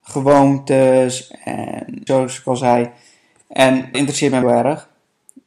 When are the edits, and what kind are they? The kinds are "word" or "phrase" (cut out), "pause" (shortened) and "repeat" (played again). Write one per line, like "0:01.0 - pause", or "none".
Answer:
0:02.1 - phrase
0:03.9 - word
0:04.4 - phrase